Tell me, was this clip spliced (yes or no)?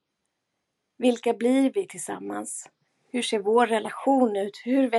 no